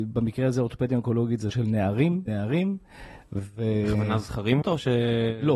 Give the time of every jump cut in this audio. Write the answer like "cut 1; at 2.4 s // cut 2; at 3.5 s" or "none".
cut 1; at 1.5 s // cut 2; at 2.3 s // cut 3; at 4.6 s